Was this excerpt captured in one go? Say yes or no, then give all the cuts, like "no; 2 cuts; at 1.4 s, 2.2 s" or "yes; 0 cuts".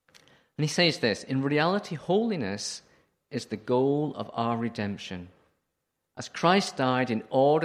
yes; 0 cuts